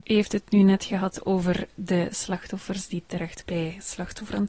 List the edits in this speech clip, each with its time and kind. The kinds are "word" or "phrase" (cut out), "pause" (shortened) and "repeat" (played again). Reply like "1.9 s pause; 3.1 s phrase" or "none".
3.5 s word